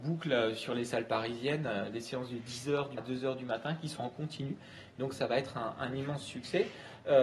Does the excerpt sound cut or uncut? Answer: cut